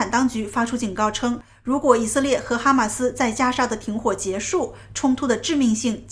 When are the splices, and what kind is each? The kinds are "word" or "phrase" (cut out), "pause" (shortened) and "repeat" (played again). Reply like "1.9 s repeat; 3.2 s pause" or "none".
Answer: none